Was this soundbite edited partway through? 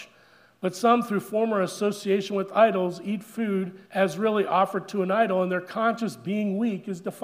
yes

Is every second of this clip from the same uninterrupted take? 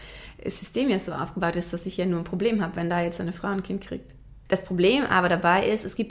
yes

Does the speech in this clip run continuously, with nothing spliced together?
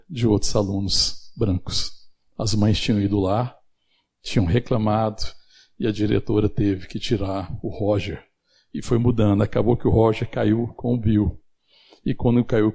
yes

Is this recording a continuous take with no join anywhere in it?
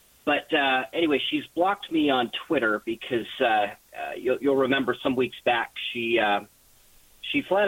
yes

